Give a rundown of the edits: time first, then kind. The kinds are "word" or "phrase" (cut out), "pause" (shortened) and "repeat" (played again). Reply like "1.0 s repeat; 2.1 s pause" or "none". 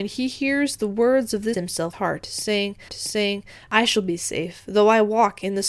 1.5 s phrase; 1.9 s phrase; 2.9 s repeat